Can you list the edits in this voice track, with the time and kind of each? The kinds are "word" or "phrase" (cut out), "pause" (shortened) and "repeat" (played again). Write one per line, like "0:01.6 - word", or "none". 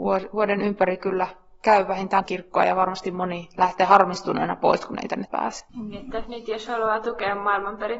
0:02.2 - word
0:05.3 - word

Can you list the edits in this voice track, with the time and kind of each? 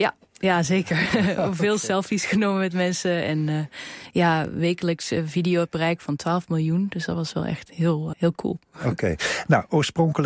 0:08.1 - word

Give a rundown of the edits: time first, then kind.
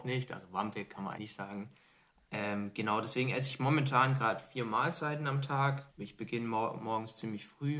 0:01.2 - word
0:05.9 - pause

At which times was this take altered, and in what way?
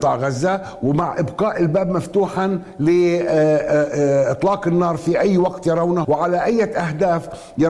0:06.0 - word

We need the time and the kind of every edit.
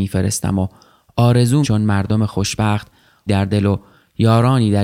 0:01.6 - phrase
0:03.3 - word

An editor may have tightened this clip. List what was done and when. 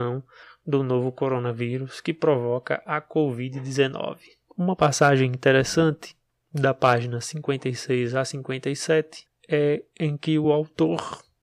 none

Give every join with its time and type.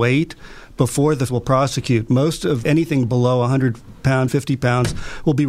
0:01.3 - word
0:02.6 - word
0:04.3 - word

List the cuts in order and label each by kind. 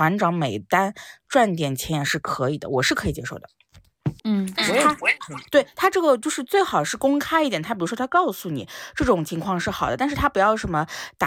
0:04.2 - pause

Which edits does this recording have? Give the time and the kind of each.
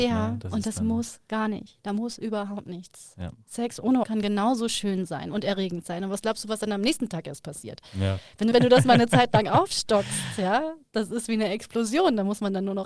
0:04.0 - word
0:08.5 - word

